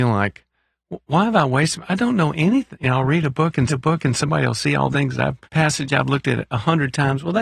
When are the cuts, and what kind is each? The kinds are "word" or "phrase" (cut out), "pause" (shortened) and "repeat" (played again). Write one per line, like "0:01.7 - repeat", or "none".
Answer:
0:03.7 - repeat
0:04.9 - word
0:05.4 - pause